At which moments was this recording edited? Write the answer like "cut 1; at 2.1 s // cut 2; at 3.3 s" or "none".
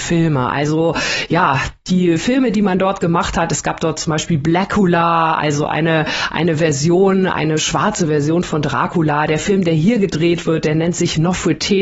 none